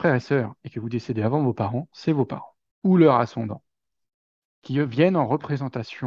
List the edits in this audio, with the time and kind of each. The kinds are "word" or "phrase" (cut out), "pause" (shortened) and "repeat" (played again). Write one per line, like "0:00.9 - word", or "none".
0:02.7 - pause